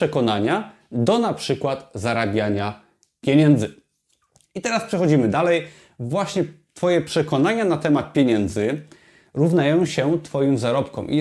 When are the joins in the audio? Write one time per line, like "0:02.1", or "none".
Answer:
none